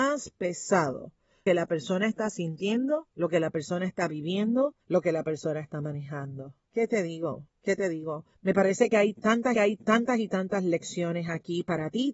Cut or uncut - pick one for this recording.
cut